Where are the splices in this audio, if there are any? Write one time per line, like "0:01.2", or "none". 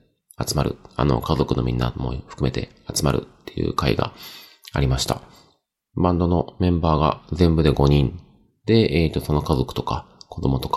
none